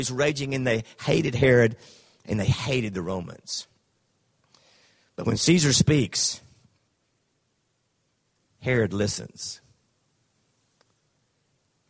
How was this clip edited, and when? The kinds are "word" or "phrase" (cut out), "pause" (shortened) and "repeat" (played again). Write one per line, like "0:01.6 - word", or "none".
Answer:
none